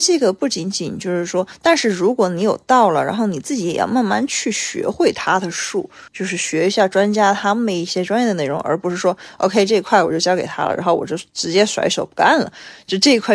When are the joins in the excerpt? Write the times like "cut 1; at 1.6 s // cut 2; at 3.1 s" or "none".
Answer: cut 1; at 6.1 s